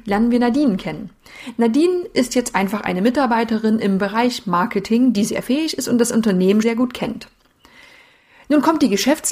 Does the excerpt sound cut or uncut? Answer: cut